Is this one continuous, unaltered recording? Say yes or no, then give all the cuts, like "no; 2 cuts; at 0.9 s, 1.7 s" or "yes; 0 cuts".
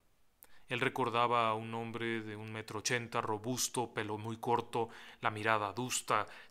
yes; 0 cuts